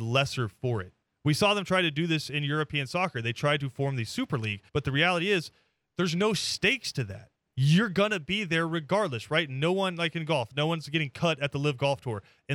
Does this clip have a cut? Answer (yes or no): yes